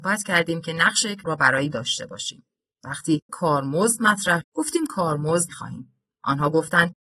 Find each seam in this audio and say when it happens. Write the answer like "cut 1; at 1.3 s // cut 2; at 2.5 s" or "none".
cut 1; at 1.2 s // cut 2; at 1.7 s // cut 3; at 3.3 s // cut 4; at 4.4 s // cut 5; at 5.5 s

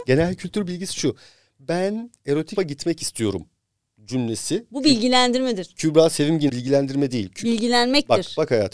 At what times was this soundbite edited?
cut 1; at 2.6 s // cut 2; at 6.5 s

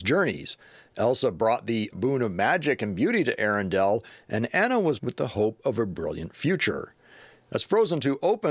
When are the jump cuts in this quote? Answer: cut 1; at 1.9 s // cut 2; at 5.0 s

